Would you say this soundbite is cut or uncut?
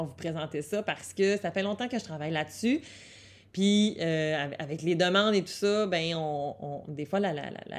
uncut